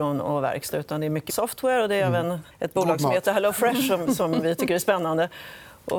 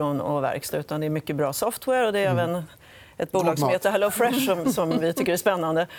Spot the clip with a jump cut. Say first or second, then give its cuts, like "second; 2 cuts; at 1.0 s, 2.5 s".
first; 2 cuts; at 1.3 s, 2.5 s